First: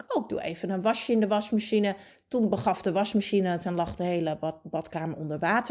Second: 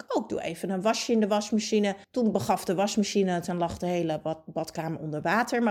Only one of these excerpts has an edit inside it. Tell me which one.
second; 1 cut; at 2.0 s

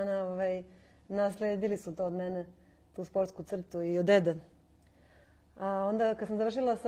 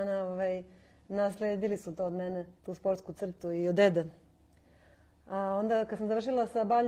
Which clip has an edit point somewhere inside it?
second; 1 cut; at 2.6 s

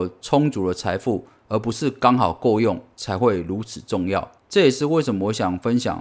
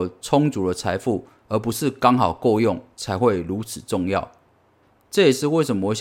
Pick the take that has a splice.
first; 1 cut; at 4.4 s

